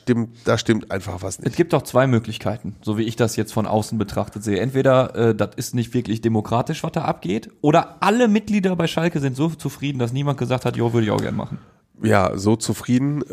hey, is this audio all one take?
yes; 0 cuts

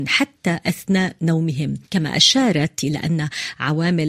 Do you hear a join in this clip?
yes; 2 cuts; at 1.8 s, 2.8 s

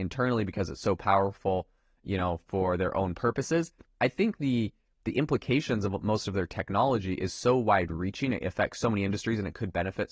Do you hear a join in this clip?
no; 0 cuts

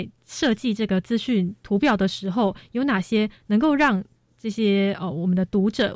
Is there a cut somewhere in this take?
no; 0 cuts

